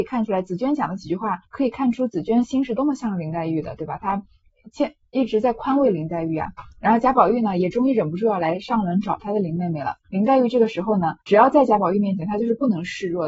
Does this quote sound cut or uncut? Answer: cut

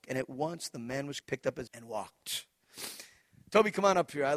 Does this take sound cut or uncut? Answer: cut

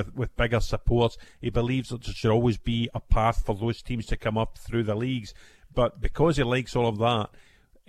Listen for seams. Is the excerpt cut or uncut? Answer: uncut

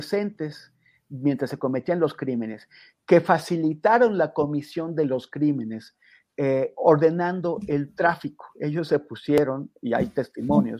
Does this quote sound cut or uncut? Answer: uncut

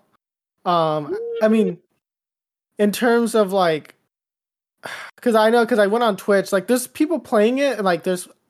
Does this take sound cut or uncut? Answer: uncut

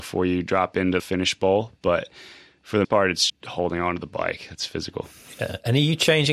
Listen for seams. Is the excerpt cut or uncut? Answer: cut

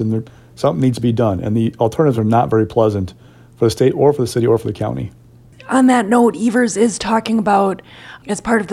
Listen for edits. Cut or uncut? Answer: uncut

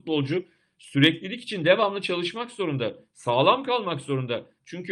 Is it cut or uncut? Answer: uncut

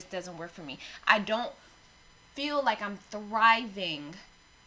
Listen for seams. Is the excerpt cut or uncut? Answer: uncut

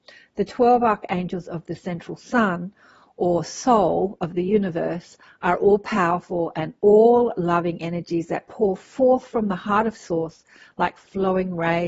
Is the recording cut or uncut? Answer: uncut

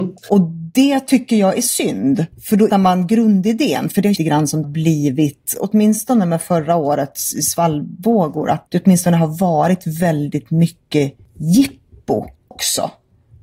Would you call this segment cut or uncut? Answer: cut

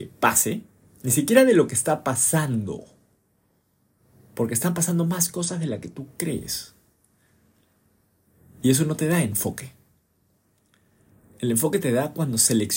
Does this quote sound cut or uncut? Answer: uncut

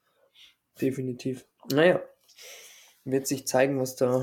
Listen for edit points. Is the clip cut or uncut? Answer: cut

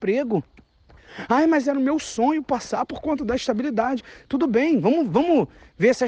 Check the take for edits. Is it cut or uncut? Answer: uncut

